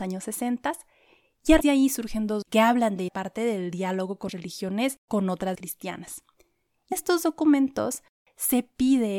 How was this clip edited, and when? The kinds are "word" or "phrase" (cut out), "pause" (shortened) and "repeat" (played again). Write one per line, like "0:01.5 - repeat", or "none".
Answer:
0:01.6 - word
0:02.4 - word
0:03.1 - word
0:04.3 - word
0:05.1 - word
0:05.5 - word
0:06.9 - word